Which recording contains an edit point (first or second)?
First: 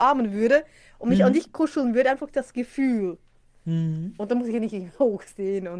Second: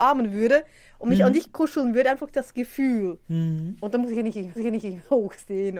second